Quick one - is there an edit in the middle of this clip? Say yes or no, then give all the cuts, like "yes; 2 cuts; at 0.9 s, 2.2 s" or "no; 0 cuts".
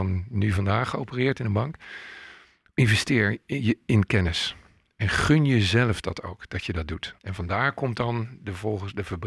yes; 1 cut; at 7.2 s